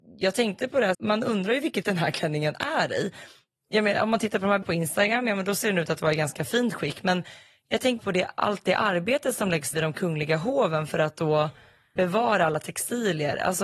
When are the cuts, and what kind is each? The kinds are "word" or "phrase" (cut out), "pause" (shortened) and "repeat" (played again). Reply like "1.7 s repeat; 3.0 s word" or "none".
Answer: 0.9 s word; 1.8 s word; 4.6 s word; 8.0 s word; 9.7 s word; 12.0 s word